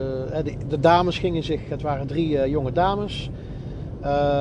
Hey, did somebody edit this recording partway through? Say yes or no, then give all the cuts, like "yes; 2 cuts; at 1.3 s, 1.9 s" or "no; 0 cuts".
no; 0 cuts